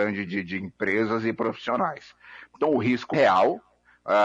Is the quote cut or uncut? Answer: cut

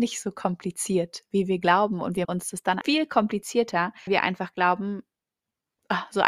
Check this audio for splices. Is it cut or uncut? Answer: cut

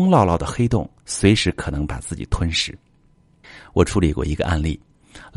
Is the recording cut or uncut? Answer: cut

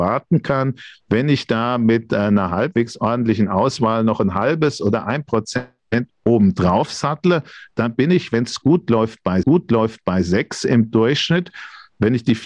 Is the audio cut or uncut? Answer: cut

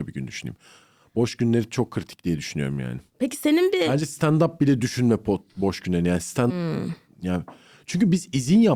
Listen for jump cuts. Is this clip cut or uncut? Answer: cut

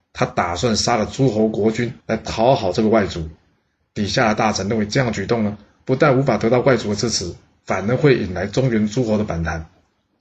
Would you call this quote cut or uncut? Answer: cut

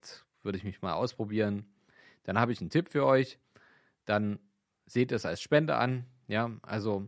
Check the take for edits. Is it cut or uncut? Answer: uncut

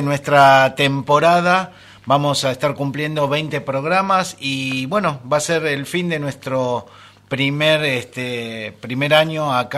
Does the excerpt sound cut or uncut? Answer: uncut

